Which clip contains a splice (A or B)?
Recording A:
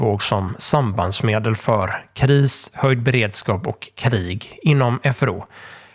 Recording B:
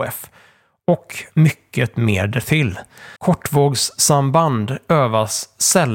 B